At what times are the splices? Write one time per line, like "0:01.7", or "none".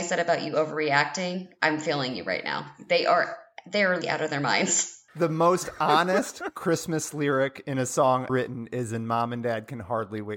0:04.0
0:08.3

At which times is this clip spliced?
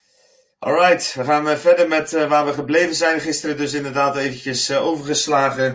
none

